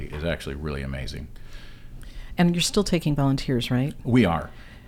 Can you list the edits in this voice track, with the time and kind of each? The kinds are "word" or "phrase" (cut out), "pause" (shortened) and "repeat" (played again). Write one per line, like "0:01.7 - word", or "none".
none